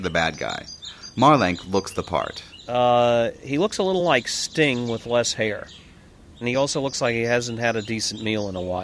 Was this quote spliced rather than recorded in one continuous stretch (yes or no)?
no